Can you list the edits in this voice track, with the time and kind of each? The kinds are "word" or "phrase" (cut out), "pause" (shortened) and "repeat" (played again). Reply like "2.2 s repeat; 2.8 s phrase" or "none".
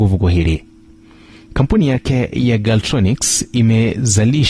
none